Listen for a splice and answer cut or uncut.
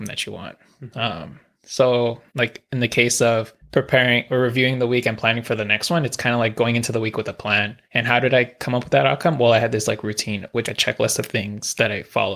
cut